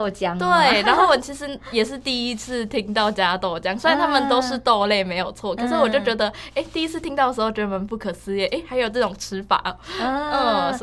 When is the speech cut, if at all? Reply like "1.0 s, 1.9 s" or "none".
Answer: none